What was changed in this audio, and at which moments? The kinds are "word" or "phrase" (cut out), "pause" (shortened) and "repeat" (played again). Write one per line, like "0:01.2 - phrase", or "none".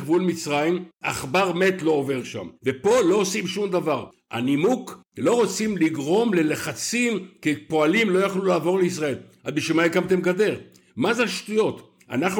0:02.6 - pause